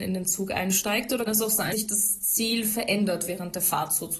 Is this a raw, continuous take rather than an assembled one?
no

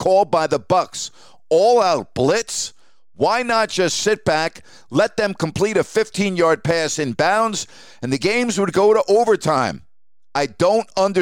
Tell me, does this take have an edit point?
no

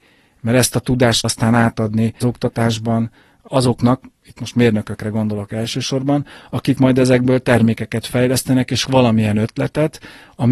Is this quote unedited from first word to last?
no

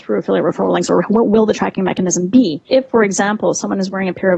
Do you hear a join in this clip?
yes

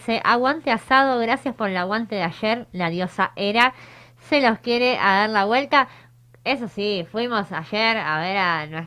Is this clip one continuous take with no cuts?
yes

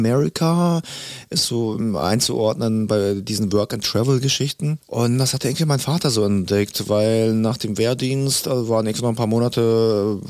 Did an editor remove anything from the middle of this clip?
no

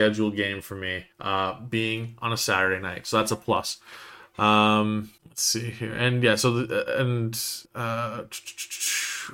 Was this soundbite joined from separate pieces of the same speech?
yes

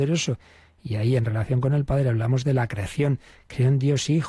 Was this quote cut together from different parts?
no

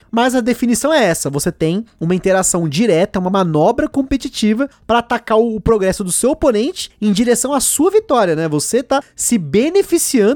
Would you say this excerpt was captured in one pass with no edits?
yes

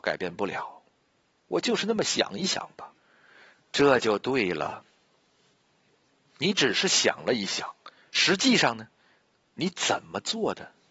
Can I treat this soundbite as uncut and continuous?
no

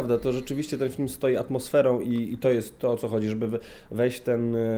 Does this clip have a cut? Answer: no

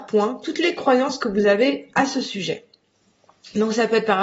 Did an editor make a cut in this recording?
no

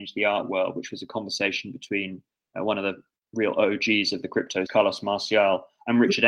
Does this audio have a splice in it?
yes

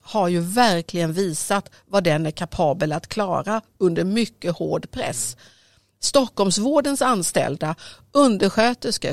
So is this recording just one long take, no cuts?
yes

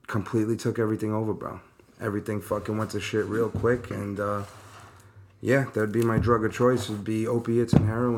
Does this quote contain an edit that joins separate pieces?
no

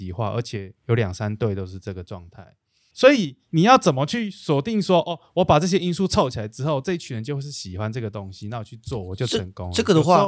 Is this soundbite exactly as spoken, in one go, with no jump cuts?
yes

